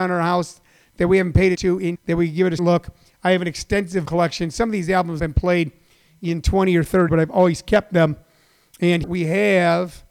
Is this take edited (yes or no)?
yes